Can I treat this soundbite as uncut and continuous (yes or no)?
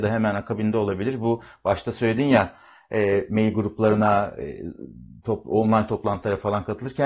yes